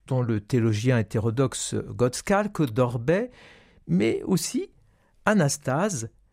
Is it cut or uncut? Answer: uncut